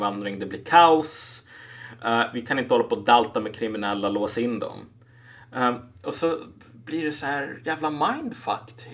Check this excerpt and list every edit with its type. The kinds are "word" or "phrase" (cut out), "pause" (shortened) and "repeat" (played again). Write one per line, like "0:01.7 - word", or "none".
none